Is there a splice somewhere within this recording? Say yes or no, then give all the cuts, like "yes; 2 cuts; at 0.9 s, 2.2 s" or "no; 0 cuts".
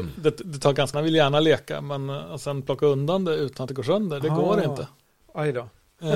yes; 2 cuts; at 0.9 s, 4.2 s